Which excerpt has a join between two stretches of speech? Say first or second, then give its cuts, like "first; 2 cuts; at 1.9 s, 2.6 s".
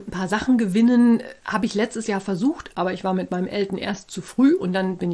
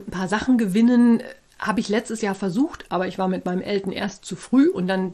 first; 1 cut; at 1.4 s